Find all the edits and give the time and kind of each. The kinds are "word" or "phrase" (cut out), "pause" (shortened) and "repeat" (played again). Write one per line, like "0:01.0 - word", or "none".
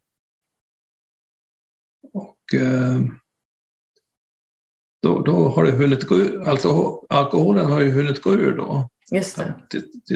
none